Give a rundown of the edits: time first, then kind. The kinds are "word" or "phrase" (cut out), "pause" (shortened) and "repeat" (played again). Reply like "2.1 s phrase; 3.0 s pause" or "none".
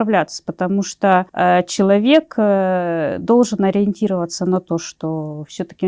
1.3 s pause